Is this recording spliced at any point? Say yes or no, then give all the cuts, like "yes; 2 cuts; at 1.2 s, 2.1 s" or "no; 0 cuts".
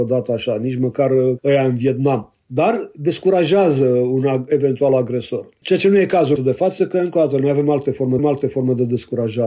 yes; 2 cuts; at 6.4 s, 8.2 s